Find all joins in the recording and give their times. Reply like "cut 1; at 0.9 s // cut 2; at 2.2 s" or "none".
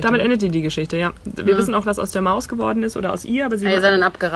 cut 1; at 1.8 s